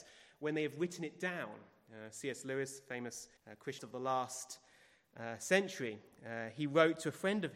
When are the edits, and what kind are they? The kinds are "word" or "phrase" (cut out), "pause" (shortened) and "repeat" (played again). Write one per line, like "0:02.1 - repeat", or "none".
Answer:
0:03.4 - pause
0:03.8 - word